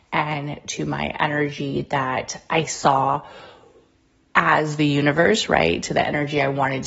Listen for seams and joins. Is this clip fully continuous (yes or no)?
yes